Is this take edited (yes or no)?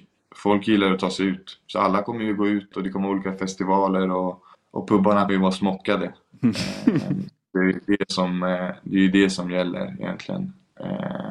yes